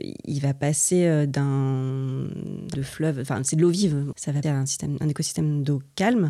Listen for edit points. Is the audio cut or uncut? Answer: cut